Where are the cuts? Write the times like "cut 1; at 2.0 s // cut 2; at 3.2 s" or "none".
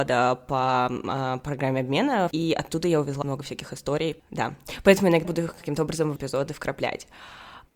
cut 1; at 2.3 s // cut 2; at 3.2 s // cut 3; at 5.2 s // cut 4; at 6.2 s